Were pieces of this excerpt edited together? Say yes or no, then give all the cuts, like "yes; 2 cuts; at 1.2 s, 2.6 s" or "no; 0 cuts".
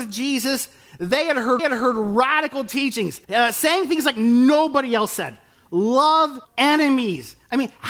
yes; 3 cuts; at 1.6 s, 3.2 s, 6.4 s